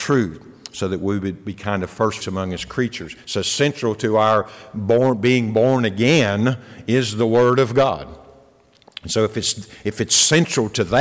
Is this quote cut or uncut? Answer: cut